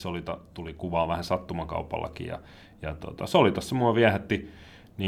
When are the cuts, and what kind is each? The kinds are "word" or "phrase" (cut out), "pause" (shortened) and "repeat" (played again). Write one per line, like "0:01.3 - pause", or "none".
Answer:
none